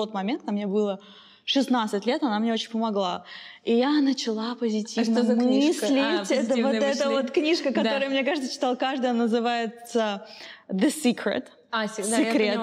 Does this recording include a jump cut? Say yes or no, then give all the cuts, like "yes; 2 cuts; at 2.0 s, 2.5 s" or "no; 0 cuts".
no; 0 cuts